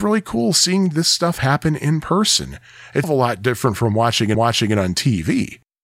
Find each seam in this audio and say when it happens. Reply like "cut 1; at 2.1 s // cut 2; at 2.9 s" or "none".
cut 1; at 3.0 s // cut 2; at 4.3 s